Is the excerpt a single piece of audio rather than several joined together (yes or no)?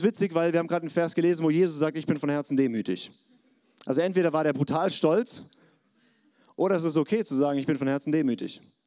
yes